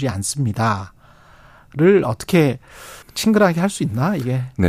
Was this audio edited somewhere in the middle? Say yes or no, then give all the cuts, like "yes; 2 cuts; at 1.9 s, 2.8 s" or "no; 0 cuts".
yes; 1 cut; at 3.0 s